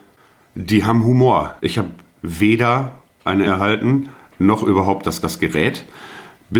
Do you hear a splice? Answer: yes; 3 cuts; at 1.6 s, 3.5 s, 5.2 s

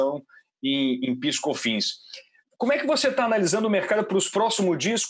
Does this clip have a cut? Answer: no; 0 cuts

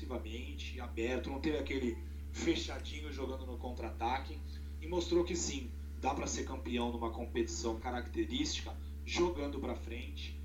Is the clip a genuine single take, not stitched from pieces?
no; 1 cut; at 7.8 s

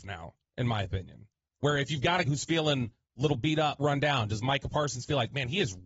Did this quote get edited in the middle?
yes; 2 cuts; at 2.2 s, 3.8 s

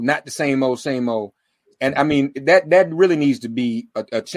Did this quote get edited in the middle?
no; 0 cuts

